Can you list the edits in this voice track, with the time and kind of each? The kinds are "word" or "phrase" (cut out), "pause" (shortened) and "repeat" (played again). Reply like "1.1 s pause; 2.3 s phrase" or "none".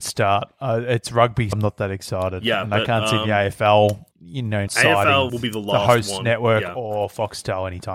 1.5 s word; 4.1 s pause; 4.7 s word; 5.3 s word